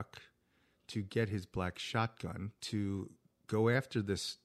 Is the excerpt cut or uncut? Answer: cut